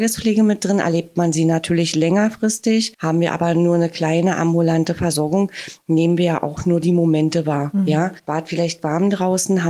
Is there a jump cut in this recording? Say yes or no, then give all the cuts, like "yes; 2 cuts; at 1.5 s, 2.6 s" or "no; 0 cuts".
no; 0 cuts